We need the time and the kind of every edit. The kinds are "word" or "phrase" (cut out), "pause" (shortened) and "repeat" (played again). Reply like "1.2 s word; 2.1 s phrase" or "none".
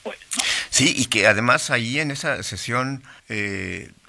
3.2 s pause

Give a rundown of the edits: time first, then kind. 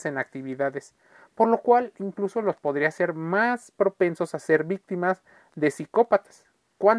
none

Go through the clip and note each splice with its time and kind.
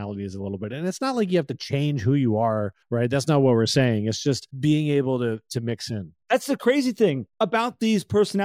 2.8 s pause; 4.5 s pause; 6.2 s pause; 7.3 s pause

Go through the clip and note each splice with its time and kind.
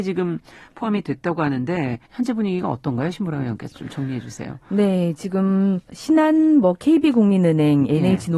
2.0 s pause; 5.8 s pause

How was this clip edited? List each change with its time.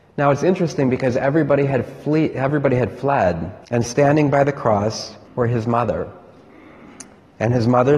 3.6 s pause; 5.2 s pause

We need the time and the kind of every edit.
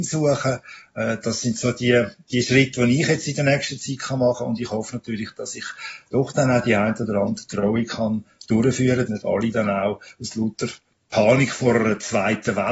9.1 s phrase

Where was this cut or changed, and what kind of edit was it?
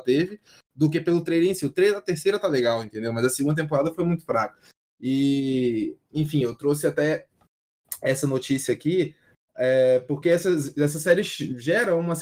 none

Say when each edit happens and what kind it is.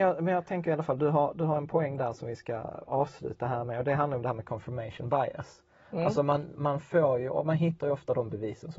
none

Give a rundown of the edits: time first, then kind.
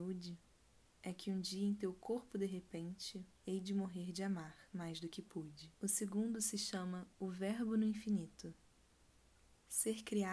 3.3 s pause; 4.7 s pause; 5.7 s pause

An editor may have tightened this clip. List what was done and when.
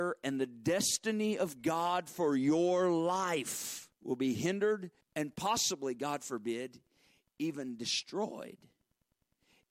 3.9 s pause; 5.0 s pause

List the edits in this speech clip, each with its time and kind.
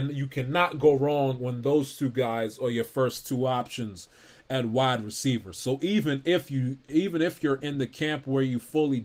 none

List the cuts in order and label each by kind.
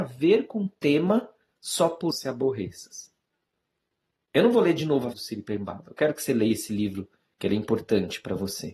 2.1 s phrase; 5.1 s word

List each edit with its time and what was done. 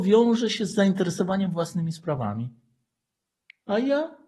none

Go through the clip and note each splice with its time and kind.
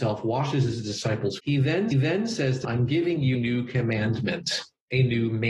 1.4 s word; 1.9 s repeat; 2.6 s word; 3.3 s word

